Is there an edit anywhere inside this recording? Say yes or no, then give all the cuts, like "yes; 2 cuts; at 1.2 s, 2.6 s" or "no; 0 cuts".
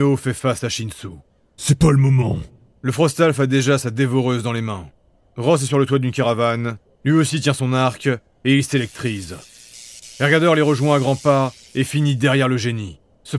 no; 0 cuts